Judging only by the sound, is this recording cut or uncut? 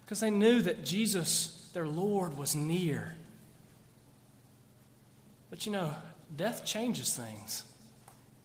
uncut